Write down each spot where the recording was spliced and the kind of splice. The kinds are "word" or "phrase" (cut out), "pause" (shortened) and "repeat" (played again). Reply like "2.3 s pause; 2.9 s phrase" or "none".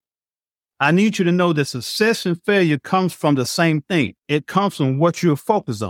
4.2 s pause